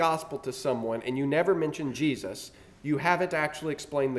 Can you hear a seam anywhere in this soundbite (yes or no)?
no